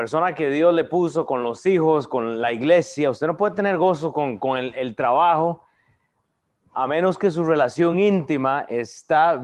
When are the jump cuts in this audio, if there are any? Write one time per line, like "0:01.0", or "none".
none